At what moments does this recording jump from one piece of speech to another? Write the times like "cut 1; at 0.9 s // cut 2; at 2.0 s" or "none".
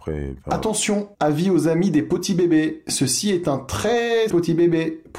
cut 1; at 1.1 s // cut 2; at 4.3 s

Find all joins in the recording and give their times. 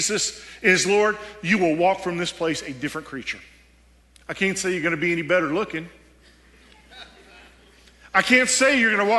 cut 1; at 4.0 s

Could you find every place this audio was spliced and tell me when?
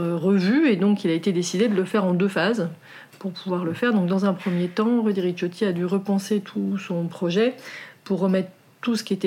none

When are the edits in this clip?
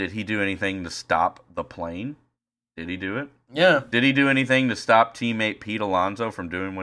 none

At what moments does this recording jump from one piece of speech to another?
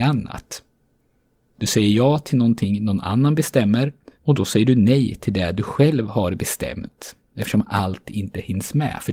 cut 1; at 4.1 s

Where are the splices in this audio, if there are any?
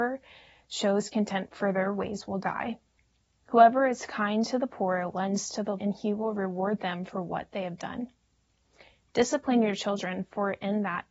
cut 1; at 5.8 s

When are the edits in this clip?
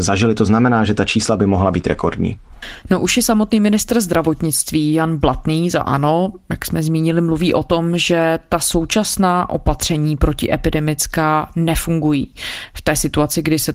none

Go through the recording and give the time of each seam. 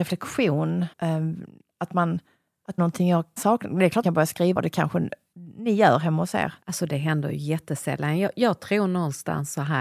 cut 1; at 0.9 s // cut 2; at 2.8 s // cut 3; at 3.4 s // cut 4; at 4.0 s // cut 5; at 4.6 s // cut 6; at 6.6 s

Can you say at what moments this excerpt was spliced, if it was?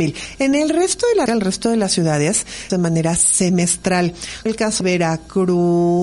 cut 1; at 1.3 s // cut 2; at 2.7 s // cut 3; at 4.5 s // cut 4; at 4.8 s

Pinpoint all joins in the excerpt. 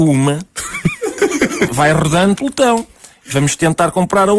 cut 1; at 1.7 s // cut 2; at 2.4 s

